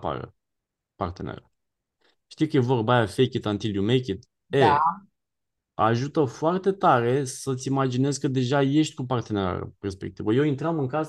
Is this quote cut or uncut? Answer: uncut